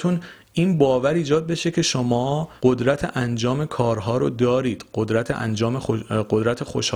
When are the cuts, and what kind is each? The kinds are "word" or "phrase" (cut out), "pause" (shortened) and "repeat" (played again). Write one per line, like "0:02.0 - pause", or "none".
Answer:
0:02.6 - pause